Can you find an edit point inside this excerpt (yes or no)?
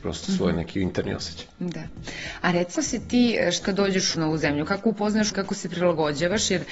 yes